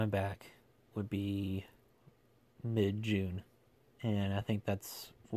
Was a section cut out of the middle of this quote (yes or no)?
no